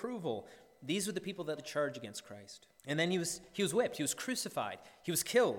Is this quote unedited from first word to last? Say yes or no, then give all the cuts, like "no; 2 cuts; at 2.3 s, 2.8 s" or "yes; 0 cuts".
no; 2 cuts; at 1.6 s, 2.8 s